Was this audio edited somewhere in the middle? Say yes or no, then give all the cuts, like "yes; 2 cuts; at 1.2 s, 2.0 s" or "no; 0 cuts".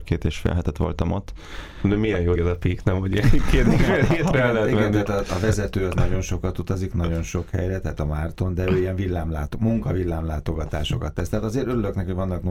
yes; 1 cut; at 2.3 s